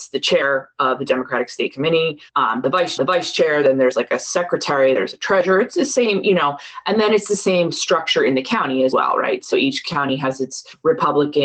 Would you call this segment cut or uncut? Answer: cut